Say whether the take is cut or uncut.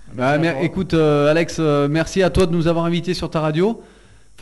uncut